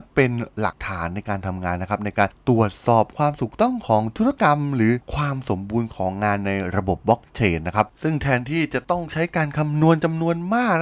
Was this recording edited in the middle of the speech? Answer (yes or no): yes